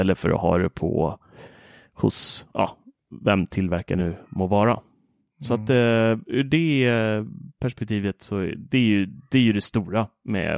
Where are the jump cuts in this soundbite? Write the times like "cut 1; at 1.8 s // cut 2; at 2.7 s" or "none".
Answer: none